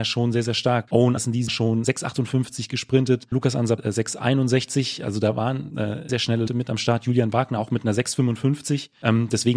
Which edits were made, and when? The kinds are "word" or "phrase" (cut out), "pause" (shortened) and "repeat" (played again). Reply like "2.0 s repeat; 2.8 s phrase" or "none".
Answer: 1.2 s word; 1.5 s word; 1.8 s word; 3.3 s word; 3.8 s word; 5.7 s word; 6.1 s word; 6.5 s word